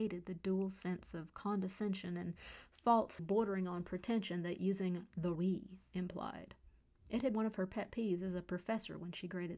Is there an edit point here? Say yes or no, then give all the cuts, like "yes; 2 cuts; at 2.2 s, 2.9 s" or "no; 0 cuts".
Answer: yes; 3 cuts; at 3.2 s, 5.3 s, 7.3 s